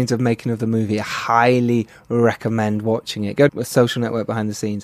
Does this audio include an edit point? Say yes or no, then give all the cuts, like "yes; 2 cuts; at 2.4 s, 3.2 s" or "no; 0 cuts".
yes; 1 cut; at 3.5 s